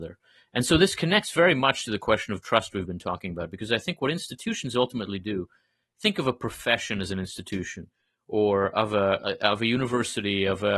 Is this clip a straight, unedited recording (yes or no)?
yes